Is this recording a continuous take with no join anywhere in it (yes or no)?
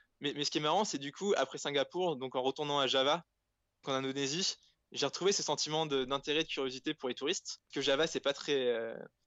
no